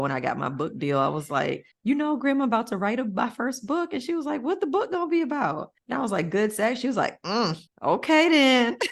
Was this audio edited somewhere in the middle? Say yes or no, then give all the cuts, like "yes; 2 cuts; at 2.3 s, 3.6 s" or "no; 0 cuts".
yes; 3 cuts; at 1.7 s, 5.8 s, 7.7 s